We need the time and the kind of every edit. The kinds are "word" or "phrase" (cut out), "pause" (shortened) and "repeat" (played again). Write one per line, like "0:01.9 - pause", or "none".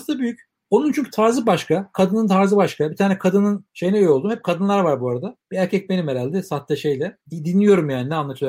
0:03.7 - pause
0:05.4 - pause
0:07.2 - pause